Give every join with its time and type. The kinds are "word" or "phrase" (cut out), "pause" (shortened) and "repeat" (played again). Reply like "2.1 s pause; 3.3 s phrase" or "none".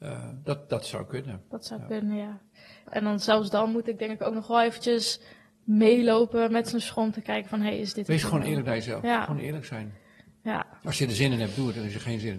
none